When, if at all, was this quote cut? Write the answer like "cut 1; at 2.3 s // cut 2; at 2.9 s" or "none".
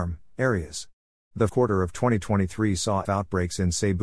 cut 1; at 1.5 s // cut 2; at 3.0 s